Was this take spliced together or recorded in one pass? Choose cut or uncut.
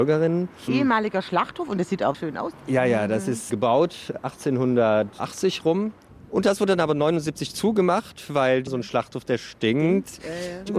cut